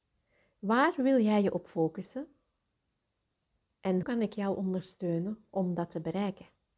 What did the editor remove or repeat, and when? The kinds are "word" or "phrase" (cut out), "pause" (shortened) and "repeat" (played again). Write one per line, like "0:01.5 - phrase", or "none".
0:04.0 - word